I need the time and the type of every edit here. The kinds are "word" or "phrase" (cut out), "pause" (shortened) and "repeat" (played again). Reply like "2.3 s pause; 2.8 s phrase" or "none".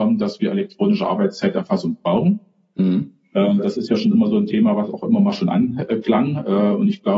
none